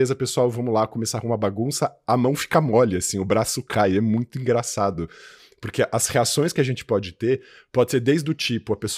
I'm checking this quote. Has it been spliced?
no; 0 cuts

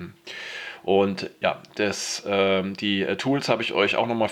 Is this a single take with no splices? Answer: yes; 0 cuts

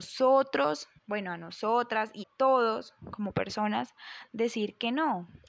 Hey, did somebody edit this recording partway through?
yes; 2 cuts; at 1.0 s, 2.2 s

